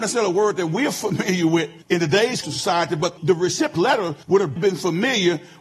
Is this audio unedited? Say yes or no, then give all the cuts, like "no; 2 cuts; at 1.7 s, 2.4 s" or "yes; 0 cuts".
no; 6 cuts; at 1.8 s, 2.4 s, 3.2 s, 3.8 s, 4.2 s, 4.6 s